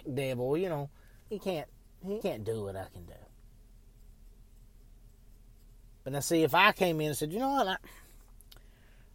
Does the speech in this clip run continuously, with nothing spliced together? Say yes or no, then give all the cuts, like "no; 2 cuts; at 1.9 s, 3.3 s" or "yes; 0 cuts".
no; 2 cuts; at 1.3 s, 2.2 s